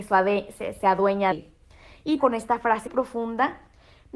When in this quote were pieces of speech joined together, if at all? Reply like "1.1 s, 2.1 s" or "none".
1.3 s, 2.2 s, 2.9 s